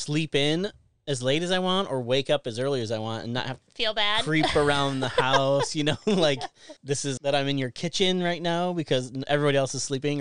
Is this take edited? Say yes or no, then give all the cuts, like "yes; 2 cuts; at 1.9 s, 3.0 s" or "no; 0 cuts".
yes; 3 cuts; at 3.6 s, 6.8 s, 7.2 s